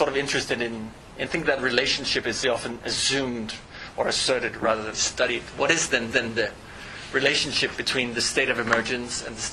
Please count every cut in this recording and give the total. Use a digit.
4